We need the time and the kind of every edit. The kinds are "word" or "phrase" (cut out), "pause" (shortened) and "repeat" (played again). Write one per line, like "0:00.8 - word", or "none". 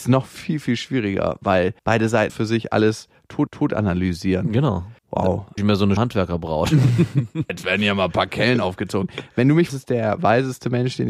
0:01.8 - pause
0:02.3 - word
0:03.5 - repeat
0:05.0 - pause
0:05.6 - phrase
0:06.0 - word
0:07.5 - word
0:09.7 - phrase